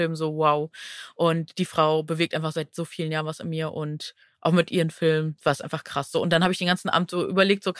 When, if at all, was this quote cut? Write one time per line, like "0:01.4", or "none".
none